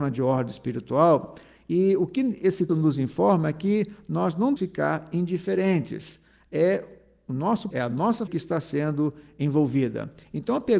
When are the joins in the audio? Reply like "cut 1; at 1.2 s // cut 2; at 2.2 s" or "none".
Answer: cut 1; at 2.7 s // cut 2; at 4.6 s // cut 3; at 7.7 s // cut 4; at 8.3 s